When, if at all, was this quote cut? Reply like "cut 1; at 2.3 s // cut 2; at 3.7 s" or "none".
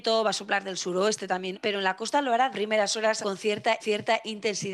cut 1; at 1.5 s // cut 2; at 2.5 s // cut 3; at 3.2 s // cut 4; at 3.8 s